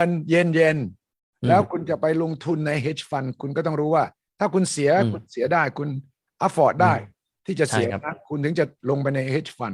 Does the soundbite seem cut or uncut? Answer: uncut